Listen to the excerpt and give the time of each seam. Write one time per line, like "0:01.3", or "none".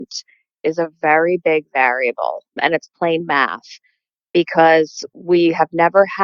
0:02.5